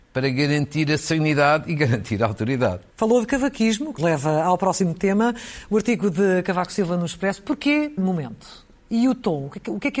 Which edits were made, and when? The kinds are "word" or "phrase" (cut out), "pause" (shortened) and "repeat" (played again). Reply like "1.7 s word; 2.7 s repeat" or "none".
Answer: 2.9 s pause; 4.0 s word; 8.0 s word